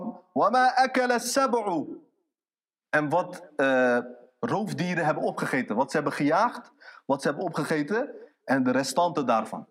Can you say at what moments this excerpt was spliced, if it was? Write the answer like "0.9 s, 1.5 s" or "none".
none